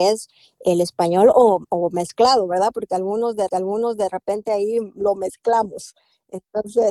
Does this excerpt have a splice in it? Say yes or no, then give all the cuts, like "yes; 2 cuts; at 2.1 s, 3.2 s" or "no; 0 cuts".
yes; 1 cut; at 3.5 s